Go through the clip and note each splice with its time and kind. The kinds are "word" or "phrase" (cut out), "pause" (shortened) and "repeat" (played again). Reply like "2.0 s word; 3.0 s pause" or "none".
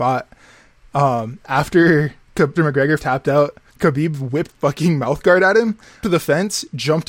2.6 s word; 3.0 s word; 3.7 s word; 4.5 s word; 6.0 s word